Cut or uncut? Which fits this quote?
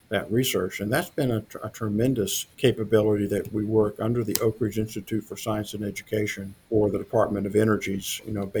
cut